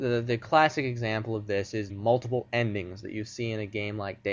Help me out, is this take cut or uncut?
cut